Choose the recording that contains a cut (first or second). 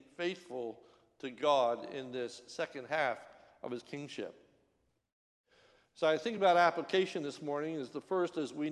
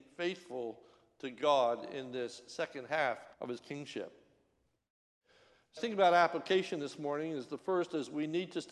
second